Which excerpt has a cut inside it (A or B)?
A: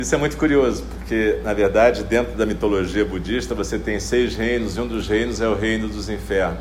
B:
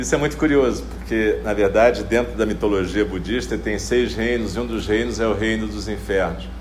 B